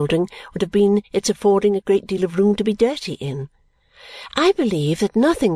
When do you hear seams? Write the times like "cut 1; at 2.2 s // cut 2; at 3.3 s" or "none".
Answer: none